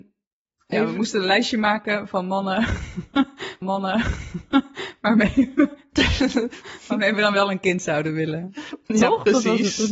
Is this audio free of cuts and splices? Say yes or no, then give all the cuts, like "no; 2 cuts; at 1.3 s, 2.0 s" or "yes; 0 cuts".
no; 1 cut; at 3.6 s